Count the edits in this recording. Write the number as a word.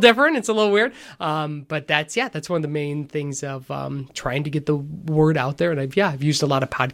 zero